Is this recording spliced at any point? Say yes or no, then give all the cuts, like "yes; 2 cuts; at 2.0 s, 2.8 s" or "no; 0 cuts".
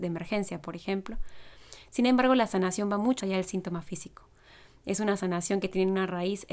yes; 1 cut; at 3.2 s